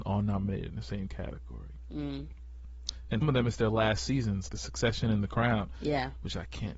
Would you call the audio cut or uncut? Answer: cut